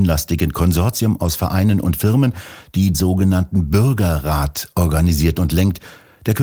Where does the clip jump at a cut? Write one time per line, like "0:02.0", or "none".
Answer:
0:02.9